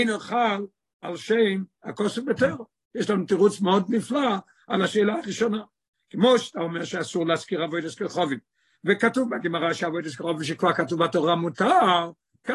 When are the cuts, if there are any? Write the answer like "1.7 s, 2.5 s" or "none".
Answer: none